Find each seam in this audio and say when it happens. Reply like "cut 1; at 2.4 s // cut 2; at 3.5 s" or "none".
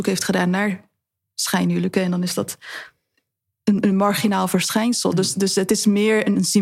none

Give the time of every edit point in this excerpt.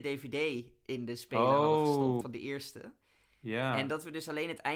cut 1; at 2.2 s

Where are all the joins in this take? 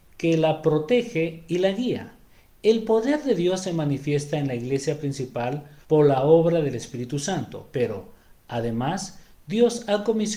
cut 1; at 5.8 s

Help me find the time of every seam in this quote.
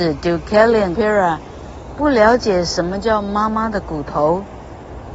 cut 1; at 0.9 s

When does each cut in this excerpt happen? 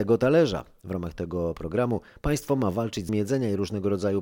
cut 1; at 3.1 s

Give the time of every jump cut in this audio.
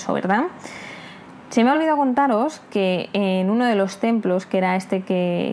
none

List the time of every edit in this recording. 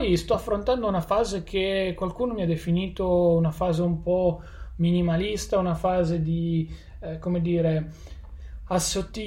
none

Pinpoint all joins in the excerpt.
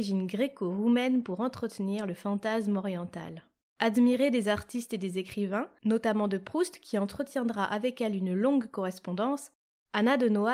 cut 1; at 3.6 s

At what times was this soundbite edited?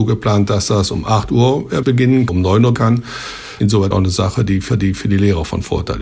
cut 1; at 1.8 s // cut 2; at 2.3 s // cut 3; at 2.7 s // cut 4; at 3.9 s // cut 5; at 4.7 s

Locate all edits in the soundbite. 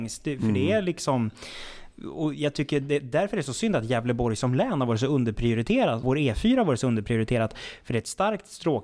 cut 1; at 6.0 s

